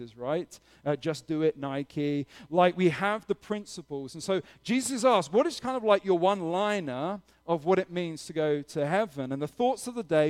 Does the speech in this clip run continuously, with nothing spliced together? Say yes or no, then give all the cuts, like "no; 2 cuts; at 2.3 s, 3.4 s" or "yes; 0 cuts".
yes; 0 cuts